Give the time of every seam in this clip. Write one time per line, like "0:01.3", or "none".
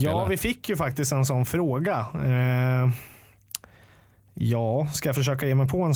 none